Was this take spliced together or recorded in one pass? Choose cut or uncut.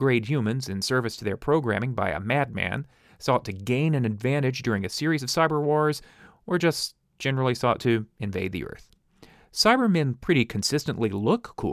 uncut